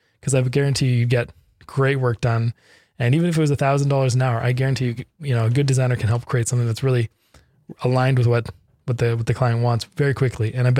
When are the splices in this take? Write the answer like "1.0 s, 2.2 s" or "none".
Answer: none

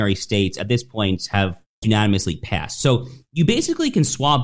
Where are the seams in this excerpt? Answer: 1.8 s

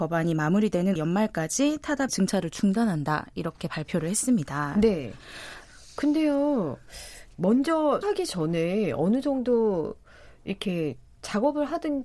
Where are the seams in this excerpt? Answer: 1.0 s, 2.1 s, 7.3 s, 8.0 s

